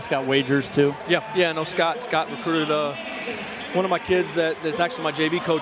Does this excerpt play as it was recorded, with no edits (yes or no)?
yes